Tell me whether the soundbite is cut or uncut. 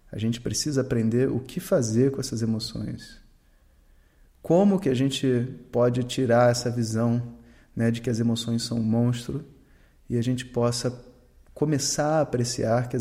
uncut